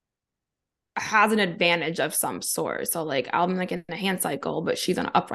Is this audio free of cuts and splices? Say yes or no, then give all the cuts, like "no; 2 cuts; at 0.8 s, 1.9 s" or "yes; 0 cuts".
yes; 0 cuts